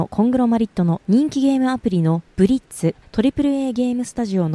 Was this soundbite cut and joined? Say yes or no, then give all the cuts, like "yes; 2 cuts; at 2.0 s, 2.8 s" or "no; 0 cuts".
yes; 1 cut; at 1.0 s